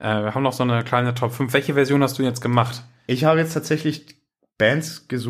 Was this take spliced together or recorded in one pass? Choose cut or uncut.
uncut